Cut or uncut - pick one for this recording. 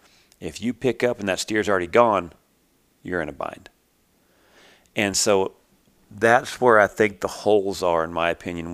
uncut